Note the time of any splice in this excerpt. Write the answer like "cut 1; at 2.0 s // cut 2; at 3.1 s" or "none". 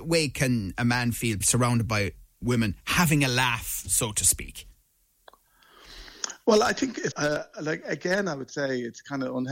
cut 1; at 1.4 s // cut 2; at 7.1 s